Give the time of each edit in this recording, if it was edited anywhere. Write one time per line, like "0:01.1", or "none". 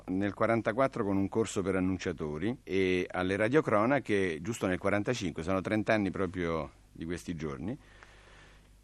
0:02.6